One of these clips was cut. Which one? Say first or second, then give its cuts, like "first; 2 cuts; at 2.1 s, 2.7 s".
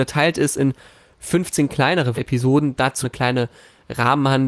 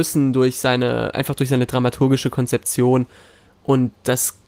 first; 2 cuts; at 2.2 s, 3.0 s